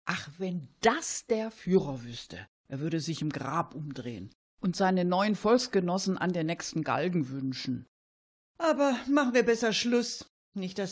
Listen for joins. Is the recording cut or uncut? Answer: uncut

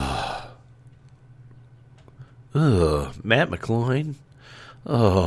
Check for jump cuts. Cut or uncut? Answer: uncut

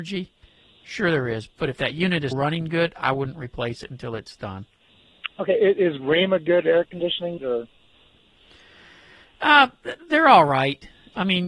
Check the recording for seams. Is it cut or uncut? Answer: cut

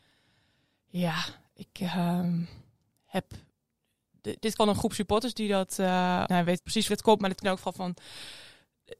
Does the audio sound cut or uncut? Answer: cut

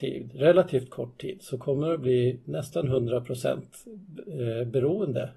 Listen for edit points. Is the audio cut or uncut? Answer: uncut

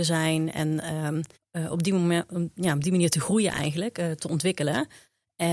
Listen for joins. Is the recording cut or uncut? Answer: cut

